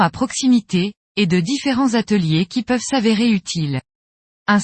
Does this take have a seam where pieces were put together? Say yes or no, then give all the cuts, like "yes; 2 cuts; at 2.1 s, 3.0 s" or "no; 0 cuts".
no; 0 cuts